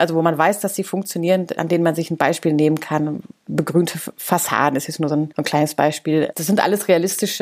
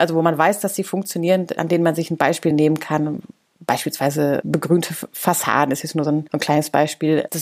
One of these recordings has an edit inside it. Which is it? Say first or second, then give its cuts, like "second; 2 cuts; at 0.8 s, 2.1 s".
first; 1 cut; at 3.5 s